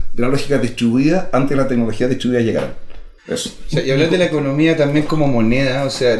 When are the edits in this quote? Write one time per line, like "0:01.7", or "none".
0:03.2